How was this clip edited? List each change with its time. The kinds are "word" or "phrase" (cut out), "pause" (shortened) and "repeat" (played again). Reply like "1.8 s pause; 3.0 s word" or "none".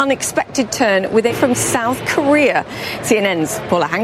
1.3 s word